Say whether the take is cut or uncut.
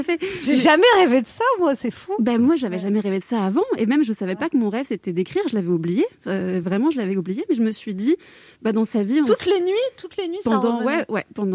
uncut